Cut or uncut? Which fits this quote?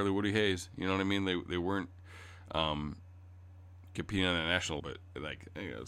cut